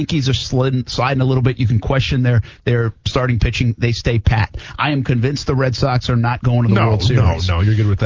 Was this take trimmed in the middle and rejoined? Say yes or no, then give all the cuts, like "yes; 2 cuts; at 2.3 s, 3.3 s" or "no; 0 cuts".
no; 0 cuts